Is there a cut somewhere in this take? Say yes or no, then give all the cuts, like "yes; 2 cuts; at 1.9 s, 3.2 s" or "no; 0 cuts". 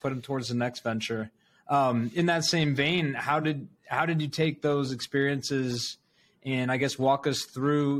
no; 0 cuts